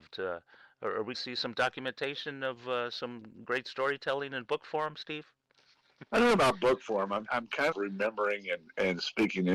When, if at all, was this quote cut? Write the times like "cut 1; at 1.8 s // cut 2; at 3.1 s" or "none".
cut 1; at 1.1 s // cut 2; at 6.1 s // cut 3; at 7.3 s // cut 4; at 7.7 s